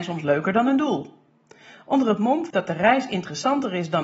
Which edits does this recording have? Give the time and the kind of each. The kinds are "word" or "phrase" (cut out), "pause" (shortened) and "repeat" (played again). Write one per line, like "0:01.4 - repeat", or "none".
0:02.5 - word